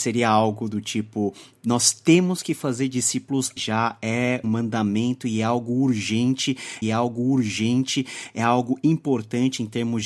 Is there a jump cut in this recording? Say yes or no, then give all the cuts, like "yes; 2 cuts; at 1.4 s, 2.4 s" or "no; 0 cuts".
yes; 3 cuts; at 3.6 s, 4.4 s, 6.8 s